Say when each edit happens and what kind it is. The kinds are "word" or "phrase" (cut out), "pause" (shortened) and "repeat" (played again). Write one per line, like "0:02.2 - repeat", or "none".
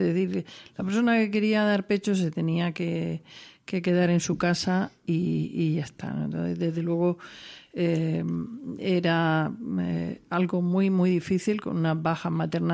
none

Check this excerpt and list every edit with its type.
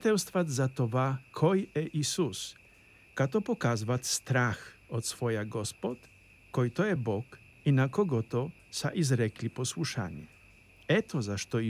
none

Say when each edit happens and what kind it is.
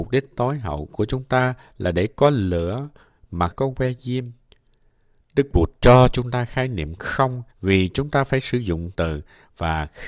0:03.5 - phrase
0:07.5 - pause
0:08.9 - word

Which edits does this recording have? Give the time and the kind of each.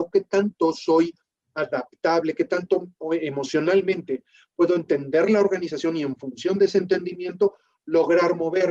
none

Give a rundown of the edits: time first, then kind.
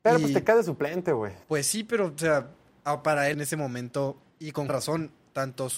0:01.4 - pause
0:03.3 - phrase
0:04.3 - pause
0:04.7 - word

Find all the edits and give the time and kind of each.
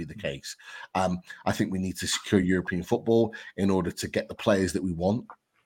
none

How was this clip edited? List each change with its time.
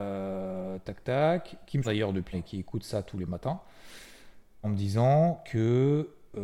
0:01.0 - word
0:01.8 - word
0:02.3 - word
0:04.6 - word

